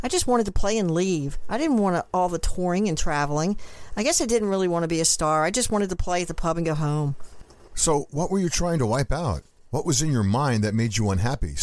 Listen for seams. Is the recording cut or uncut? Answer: uncut